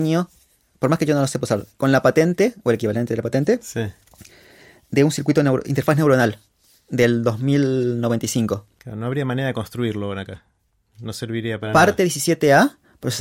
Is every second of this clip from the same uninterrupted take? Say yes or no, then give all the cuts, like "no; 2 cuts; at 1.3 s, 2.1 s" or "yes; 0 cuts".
yes; 0 cuts